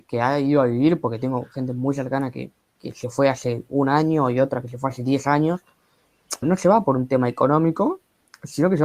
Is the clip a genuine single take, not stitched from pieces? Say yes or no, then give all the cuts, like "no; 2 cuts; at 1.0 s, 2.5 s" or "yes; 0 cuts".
no; 1 cut; at 6.4 s